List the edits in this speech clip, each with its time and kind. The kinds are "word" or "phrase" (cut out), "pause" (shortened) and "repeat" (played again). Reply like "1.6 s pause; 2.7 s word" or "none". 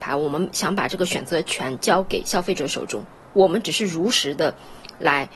3.2 s pause